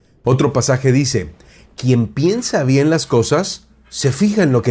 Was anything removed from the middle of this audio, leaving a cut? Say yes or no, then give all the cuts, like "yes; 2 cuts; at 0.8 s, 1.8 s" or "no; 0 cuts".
no; 0 cuts